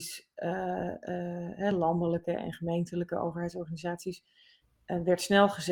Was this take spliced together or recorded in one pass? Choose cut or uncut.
uncut